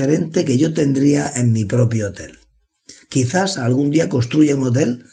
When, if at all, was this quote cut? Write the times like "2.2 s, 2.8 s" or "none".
none

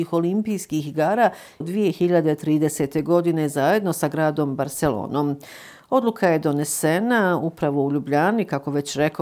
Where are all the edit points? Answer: 1.6 s

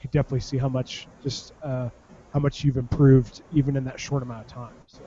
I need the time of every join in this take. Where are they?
none

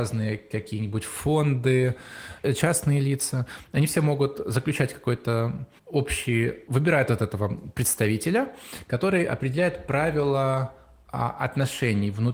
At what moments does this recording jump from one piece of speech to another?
5.8 s

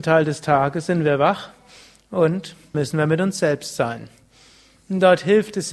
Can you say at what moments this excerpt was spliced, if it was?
2.7 s

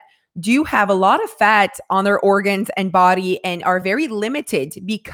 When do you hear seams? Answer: none

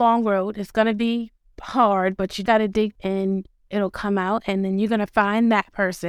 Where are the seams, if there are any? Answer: 1.4 s, 2.5 s, 3.0 s

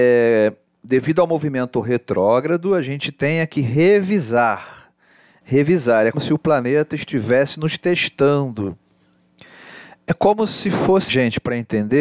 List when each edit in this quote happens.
6.1 s, 11.1 s

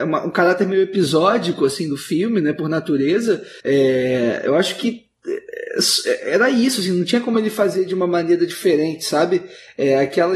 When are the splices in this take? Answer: 3.6 s

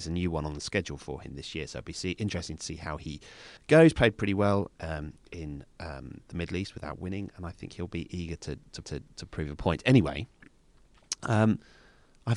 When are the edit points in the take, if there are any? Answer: 3.6 s, 8.8 s

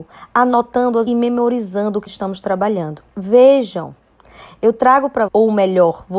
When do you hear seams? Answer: 1.1 s, 2.1 s, 3.1 s, 5.3 s

